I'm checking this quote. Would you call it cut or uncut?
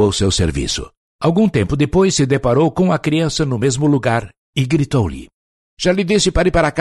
cut